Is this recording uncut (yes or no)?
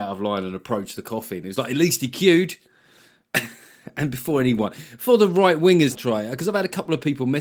no